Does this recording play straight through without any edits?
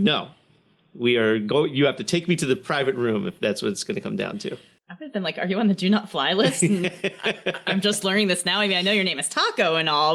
yes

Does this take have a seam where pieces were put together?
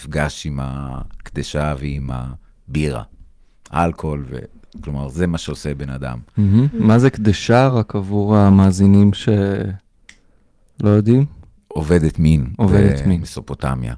no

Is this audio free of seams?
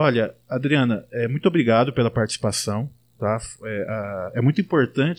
yes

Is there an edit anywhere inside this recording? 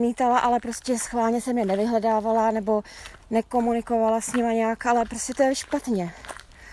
yes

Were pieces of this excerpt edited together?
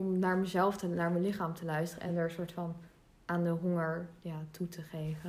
no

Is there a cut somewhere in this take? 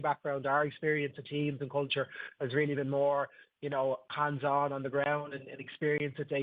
no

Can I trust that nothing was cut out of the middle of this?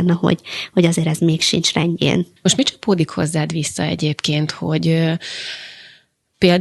no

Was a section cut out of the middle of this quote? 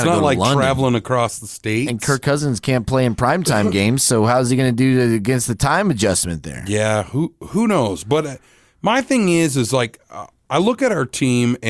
no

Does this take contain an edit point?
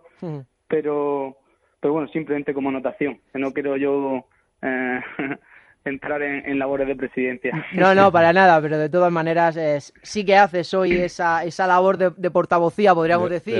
no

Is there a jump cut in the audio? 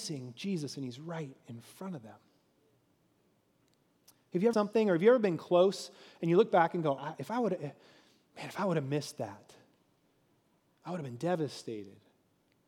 yes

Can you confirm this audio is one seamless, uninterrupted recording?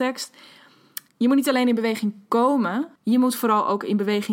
no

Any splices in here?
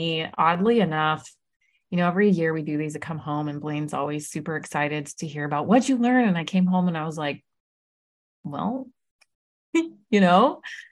no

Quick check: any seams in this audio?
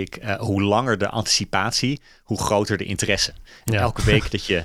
no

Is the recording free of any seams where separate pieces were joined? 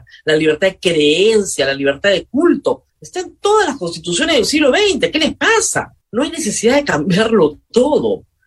no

